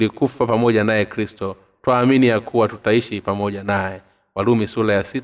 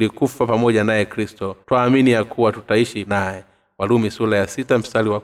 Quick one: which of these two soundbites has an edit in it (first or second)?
second